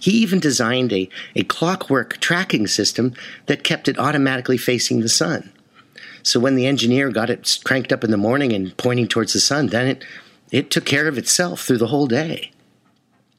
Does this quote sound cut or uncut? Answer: uncut